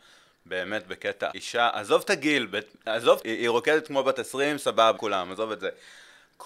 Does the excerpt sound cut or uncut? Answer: cut